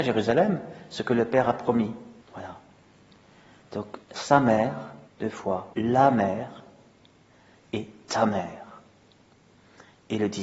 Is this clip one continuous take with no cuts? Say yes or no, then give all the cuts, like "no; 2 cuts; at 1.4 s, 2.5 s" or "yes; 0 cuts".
no; 4 cuts; at 2.2 s, 4.0 s, 5.1 s, 5.7 s